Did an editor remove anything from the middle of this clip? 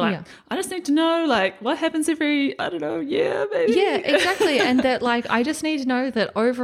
no; 0 cuts

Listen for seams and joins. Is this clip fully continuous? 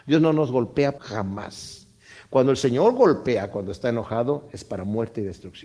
no; 1 cut; at 1.0 s

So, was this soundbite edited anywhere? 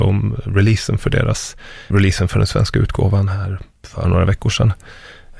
yes; 2 cuts; at 1.9 s, 4.0 s

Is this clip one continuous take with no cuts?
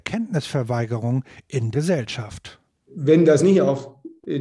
no; 1 cut; at 1.7 s

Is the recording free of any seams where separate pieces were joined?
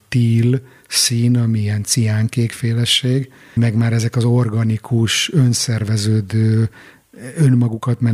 no; 1 cut; at 3.6 s

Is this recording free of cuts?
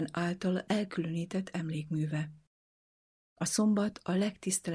yes; 0 cuts

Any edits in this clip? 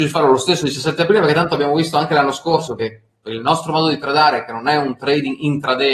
no; 0 cuts

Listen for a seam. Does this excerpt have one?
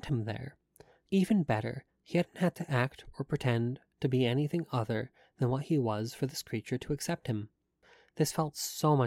no; 0 cuts

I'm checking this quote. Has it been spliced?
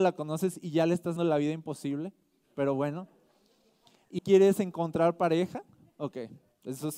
yes; 2 cuts; at 1.2 s, 4.2 s

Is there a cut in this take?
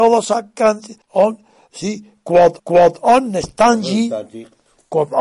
yes; 2 cuts; at 1.0 s, 2.6 s

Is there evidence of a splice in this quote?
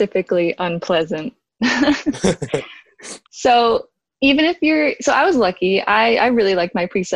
no; 0 cuts

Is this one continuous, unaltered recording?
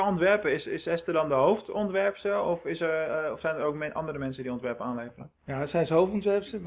no; 1 cut; at 5.4 s

